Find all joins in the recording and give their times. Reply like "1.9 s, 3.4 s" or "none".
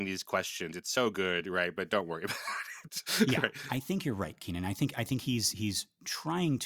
none